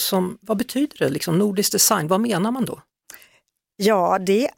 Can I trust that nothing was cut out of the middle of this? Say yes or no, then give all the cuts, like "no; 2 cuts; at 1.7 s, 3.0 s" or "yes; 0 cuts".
yes; 0 cuts